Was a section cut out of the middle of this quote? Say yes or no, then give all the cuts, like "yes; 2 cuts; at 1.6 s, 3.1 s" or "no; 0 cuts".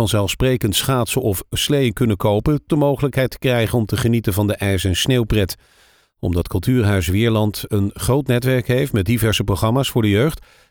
yes; 1 cut; at 2.7 s